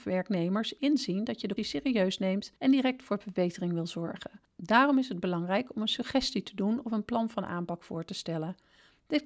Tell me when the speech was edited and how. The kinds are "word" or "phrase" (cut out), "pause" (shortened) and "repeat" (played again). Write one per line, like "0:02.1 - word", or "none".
0:01.6 - word
0:02.6 - pause